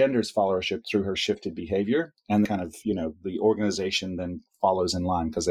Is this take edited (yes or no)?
yes